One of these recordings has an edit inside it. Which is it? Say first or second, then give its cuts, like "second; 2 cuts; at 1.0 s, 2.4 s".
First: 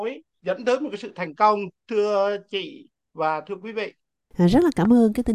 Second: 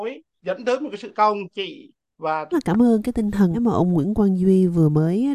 second; 4 cuts; at 1.1 s, 1.5 s, 2.5 s, 3.5 s